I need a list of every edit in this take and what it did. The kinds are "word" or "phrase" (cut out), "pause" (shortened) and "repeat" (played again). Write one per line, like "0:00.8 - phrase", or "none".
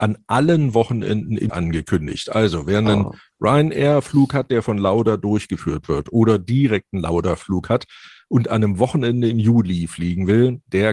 0:01.5 - word